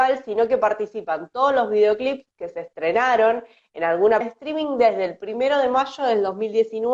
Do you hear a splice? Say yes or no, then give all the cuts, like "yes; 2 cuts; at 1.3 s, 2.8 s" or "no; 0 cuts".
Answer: yes; 1 cut; at 4.2 s